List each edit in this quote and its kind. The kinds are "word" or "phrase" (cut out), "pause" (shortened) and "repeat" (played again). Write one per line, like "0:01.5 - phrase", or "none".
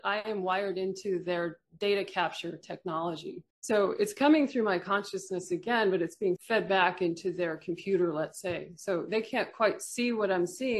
0:03.5 - pause
0:06.4 - word